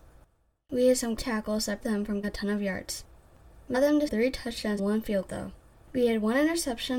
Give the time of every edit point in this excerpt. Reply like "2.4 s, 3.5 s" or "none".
1.2 s, 1.8 s, 2.2 s, 3.7 s, 4.1 s, 4.8 s, 5.3 s

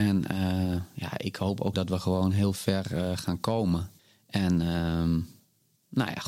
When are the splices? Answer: 1.7 s, 4.0 s

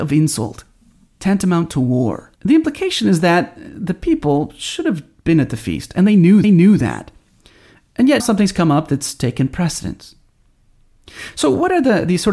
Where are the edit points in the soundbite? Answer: 2.3 s, 6.4 s, 8.2 s

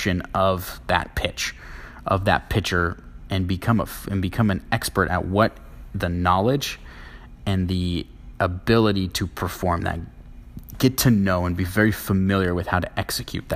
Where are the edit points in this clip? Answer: none

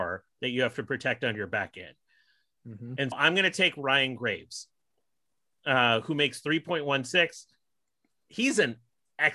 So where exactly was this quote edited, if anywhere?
3.1 s

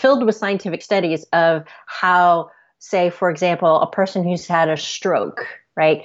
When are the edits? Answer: none

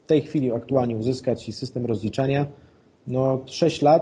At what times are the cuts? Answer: none

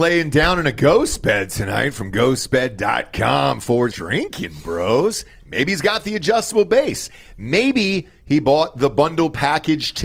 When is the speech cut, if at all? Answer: 3.9 s

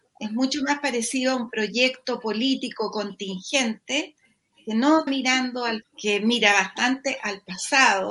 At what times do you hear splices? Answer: 5.1 s, 5.8 s

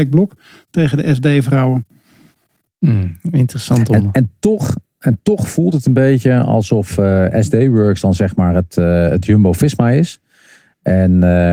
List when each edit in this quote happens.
none

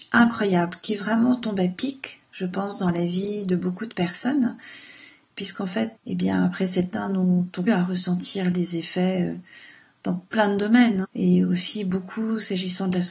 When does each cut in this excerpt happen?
6.0 s, 6.9 s, 7.7 s, 11.0 s

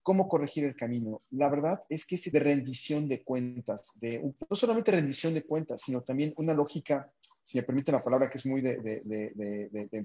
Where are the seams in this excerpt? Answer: 2.3 s, 4.5 s

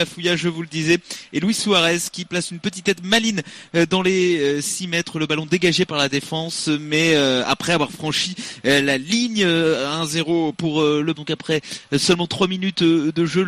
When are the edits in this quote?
11.1 s

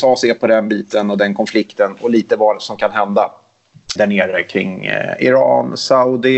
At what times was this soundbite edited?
4.0 s

